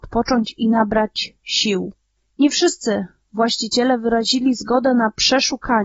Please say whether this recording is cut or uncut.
uncut